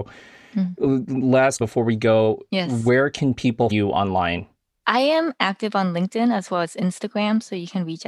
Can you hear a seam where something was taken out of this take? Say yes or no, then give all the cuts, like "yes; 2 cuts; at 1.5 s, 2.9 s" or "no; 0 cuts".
yes; 2 cuts; at 1.6 s, 3.7 s